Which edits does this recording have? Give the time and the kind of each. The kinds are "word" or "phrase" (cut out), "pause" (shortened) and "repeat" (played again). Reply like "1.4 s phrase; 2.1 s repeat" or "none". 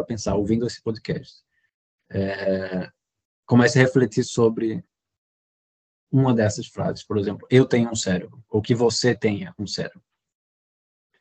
none